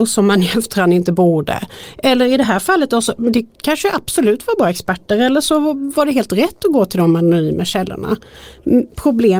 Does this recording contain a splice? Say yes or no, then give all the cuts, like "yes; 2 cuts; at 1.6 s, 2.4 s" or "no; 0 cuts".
no; 0 cuts